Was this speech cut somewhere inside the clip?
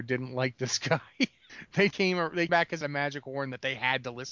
yes; 3 cuts; at 1.9 s, 2.5 s, 2.8 s

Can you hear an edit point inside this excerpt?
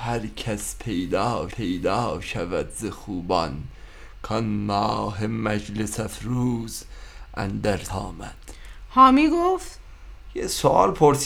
yes; 2 cuts; at 1.5 s, 7.9 s

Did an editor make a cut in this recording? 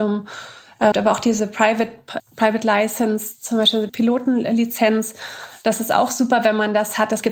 yes; 3 cuts; at 0.9 s, 2.2 s, 3.9 s

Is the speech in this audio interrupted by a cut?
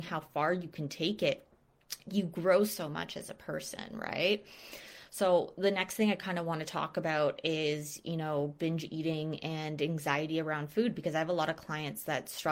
no; 0 cuts

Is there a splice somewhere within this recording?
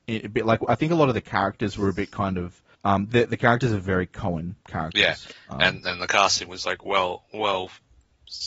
yes; 2 cuts; at 2.7 s, 4.6 s

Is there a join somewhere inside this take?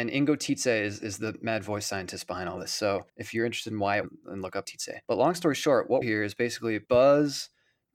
yes; 6 cuts; at 3.1 s, 4.0 s, 4.6 s, 5.0 s, 6.0 s, 6.8 s

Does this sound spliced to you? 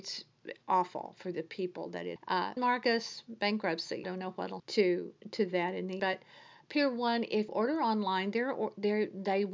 yes; 6 cuts; at 2.2 s, 2.6 s, 4.0 s, 4.6 s, 6.0 s, 7.5 s

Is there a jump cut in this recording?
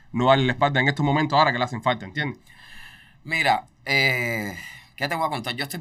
no; 0 cuts

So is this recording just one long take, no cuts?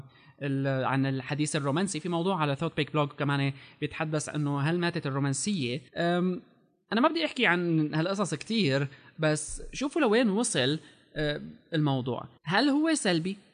no; 2 cuts; at 5.9 s, 12.4 s

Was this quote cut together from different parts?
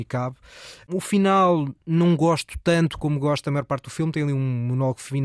no; 0 cuts

